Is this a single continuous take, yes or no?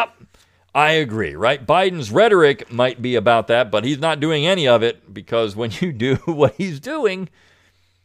yes